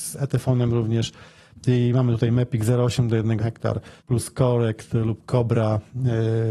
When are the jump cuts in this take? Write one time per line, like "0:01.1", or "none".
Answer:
0:03.4
0:04.0